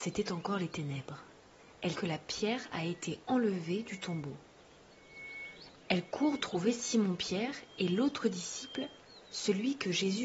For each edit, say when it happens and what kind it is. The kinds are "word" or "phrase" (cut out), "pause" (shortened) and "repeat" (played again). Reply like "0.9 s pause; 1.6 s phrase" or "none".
1.9 s word; 3.2 s pause; 6.4 s word